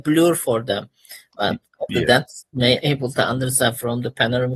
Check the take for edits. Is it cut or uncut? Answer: cut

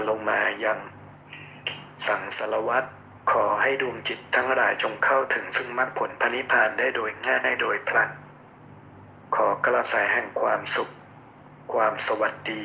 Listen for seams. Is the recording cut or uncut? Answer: cut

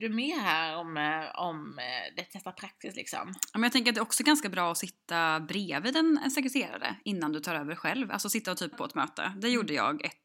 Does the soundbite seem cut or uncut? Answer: cut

